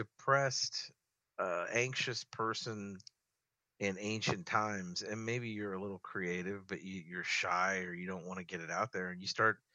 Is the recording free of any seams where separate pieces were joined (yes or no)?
yes